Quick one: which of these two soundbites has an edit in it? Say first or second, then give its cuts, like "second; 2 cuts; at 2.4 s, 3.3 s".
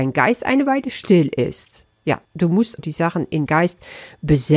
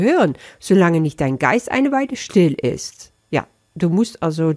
first; 3 cuts; at 2.2 s, 2.8 s, 3.5 s